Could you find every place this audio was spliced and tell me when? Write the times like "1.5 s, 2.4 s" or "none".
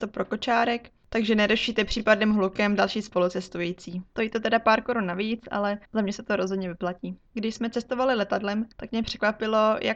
4.1 s, 5.8 s, 7.3 s, 8.7 s